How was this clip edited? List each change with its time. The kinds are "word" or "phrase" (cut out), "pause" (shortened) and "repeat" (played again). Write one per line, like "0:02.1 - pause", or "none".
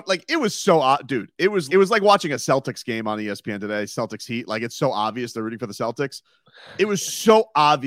0:01.7 - word